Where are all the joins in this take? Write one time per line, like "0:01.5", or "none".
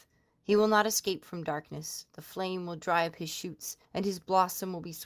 0:03.8